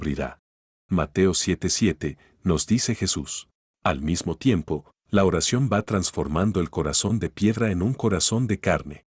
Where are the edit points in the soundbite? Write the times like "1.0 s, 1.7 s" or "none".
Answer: 3.6 s